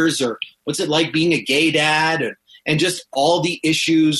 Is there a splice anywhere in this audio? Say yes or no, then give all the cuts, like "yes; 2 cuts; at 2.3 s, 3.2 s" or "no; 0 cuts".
no; 0 cuts